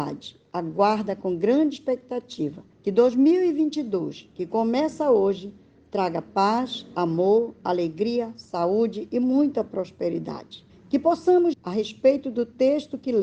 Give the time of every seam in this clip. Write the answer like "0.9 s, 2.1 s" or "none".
2.7 s, 10.7 s, 11.5 s